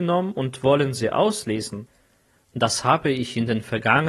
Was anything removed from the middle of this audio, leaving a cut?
no; 0 cuts

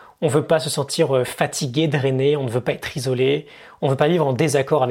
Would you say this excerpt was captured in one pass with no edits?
yes; 0 cuts

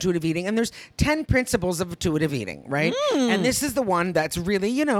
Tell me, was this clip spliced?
no; 0 cuts

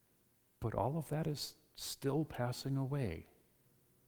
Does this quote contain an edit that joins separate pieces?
no; 0 cuts

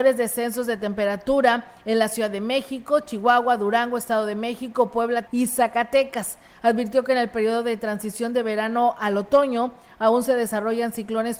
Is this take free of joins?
no; 1 cut; at 5.3 s

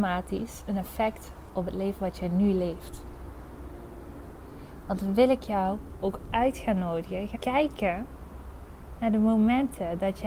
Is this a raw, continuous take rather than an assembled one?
no; 1 cut; at 7.3 s

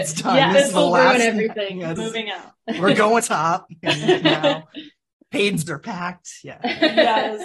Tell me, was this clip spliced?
yes; 3 cuts; at 2.0 s, 3.2 s, 5.7 s

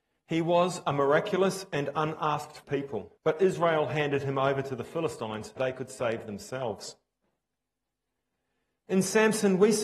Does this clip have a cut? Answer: yes; 3 cuts; at 2.6 s, 3.2 s, 5.6 s

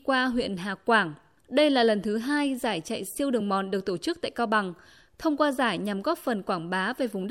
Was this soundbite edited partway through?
no; 0 cuts

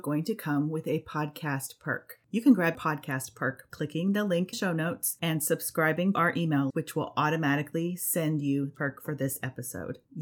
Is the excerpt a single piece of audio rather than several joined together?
no; 6 cuts; at 2.7 s, 3.7 s, 4.5 s, 6.1 s, 6.7 s, 8.7 s

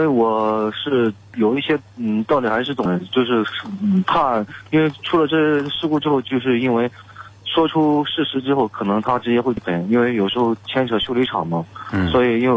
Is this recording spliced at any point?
no; 0 cuts

